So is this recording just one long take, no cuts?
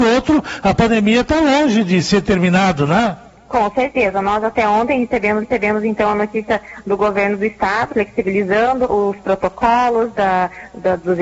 no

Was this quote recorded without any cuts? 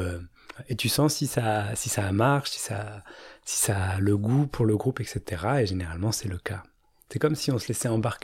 yes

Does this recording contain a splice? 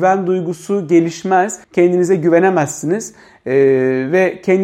yes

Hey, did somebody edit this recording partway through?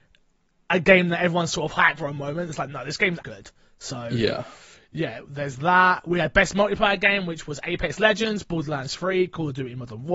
yes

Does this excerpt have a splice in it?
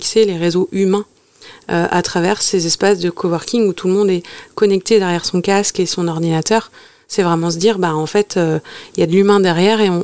no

